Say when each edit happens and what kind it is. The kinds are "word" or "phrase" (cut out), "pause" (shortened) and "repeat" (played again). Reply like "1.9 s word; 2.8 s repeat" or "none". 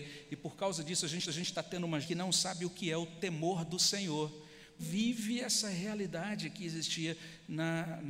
1.3 s repeat; 2.0 s word; 4.8 s phrase